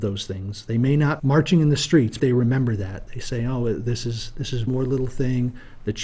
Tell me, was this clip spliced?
yes; 3 cuts; at 1.2 s, 2.2 s, 4.7 s

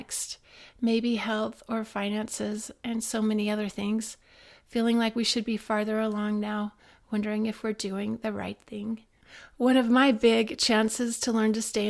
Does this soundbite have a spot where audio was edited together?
no; 0 cuts

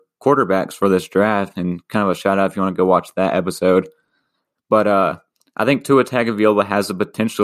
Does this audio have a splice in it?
no; 0 cuts

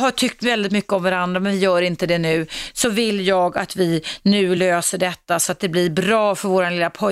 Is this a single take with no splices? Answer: yes; 0 cuts

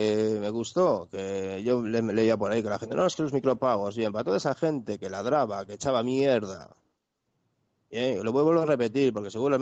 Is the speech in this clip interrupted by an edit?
no; 0 cuts

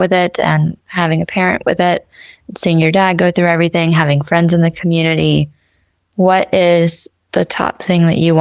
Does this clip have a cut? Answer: no; 0 cuts

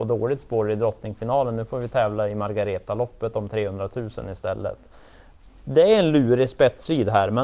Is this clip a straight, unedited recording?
yes; 0 cuts

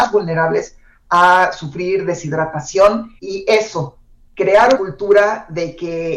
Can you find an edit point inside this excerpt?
yes; 2 cuts; at 3.2 s, 4.8 s

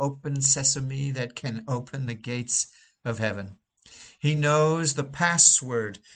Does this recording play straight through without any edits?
yes; 0 cuts

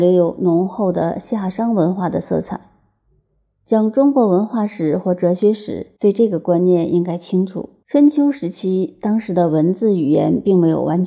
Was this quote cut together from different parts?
yes; 2 cuts; at 6.0 s, 7.8 s

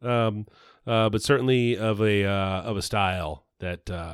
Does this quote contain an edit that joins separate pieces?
no; 0 cuts

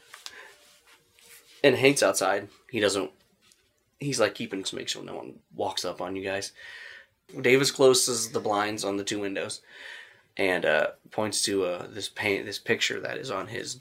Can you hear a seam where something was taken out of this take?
yes; 3 cuts; at 2.0 s, 4.6 s, 5.4 s

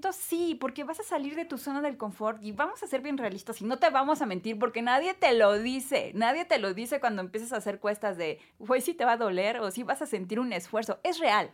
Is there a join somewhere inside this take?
no; 0 cuts

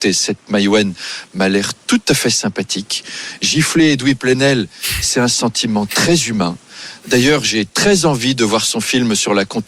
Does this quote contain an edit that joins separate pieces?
no; 0 cuts

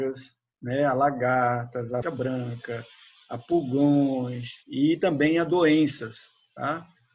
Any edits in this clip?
yes; 2 cuts; at 2.0 s, 4.6 s

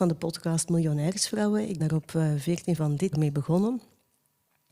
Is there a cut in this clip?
yes; 3 cuts; at 1.8 s, 2.8 s, 3.1 s

